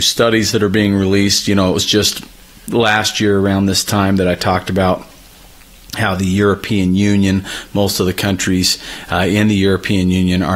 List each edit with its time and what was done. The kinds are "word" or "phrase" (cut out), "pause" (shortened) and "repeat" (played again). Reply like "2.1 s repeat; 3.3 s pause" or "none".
none